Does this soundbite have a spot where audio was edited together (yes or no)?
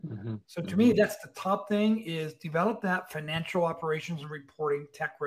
no